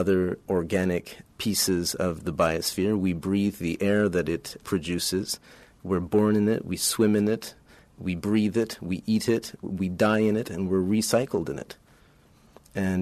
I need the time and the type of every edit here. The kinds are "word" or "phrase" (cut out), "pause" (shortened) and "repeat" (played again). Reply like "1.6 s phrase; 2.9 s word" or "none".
none